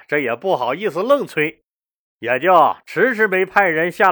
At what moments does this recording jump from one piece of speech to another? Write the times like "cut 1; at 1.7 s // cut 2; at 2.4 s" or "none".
none